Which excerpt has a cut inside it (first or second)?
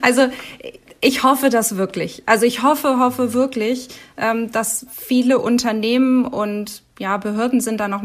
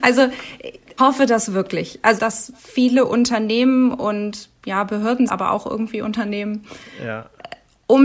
second